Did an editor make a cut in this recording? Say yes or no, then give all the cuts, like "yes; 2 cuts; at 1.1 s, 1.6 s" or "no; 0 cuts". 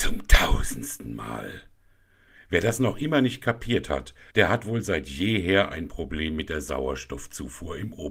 yes; 1 cut; at 4.3 s